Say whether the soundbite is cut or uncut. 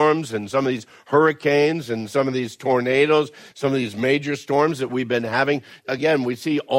uncut